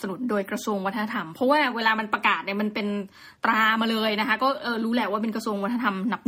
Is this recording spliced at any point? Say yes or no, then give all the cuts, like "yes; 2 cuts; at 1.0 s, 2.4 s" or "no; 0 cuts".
yes; 1 cut; at 3.4 s